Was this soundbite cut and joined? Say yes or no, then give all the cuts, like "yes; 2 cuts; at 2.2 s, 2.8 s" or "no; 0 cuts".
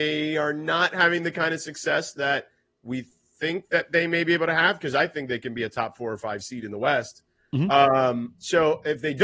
no; 0 cuts